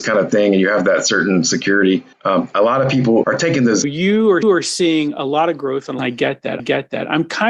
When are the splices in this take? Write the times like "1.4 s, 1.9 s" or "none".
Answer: 2.1 s, 3.2 s, 3.8 s, 4.4 s, 6.0 s, 6.6 s

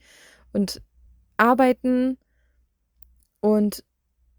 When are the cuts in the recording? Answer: 1.1 s

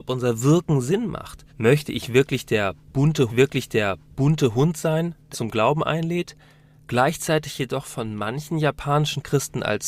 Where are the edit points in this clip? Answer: 1.5 s, 3.3 s, 5.3 s

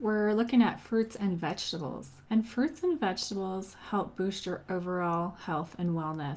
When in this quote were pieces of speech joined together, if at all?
2.3 s

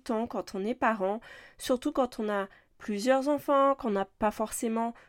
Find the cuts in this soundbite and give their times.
none

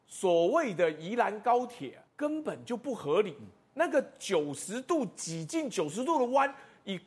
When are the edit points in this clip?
2.1 s

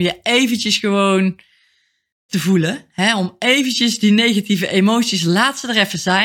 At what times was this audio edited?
2.3 s

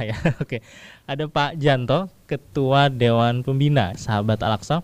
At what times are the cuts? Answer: none

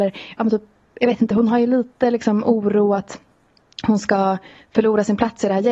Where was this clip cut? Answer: none

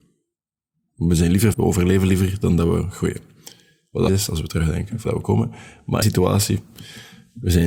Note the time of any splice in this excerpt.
1.5 s, 4.1 s, 5.0 s, 6.0 s

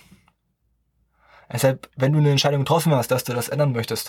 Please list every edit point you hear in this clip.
none

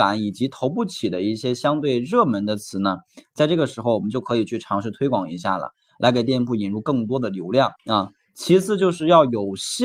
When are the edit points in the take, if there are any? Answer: 7.8 s

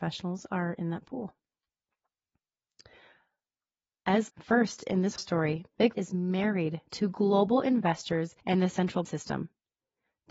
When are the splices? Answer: 4.3 s, 5.2 s, 5.9 s, 6.9 s, 8.4 s, 9.0 s

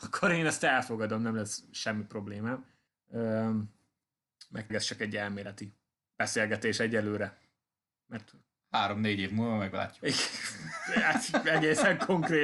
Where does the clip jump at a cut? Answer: 4.7 s

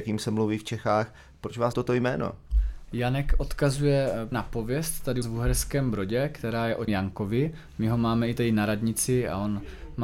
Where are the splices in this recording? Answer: 1.7 s, 4.3 s, 5.2 s, 6.9 s

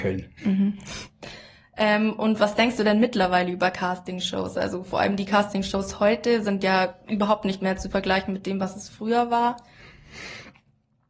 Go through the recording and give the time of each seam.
none

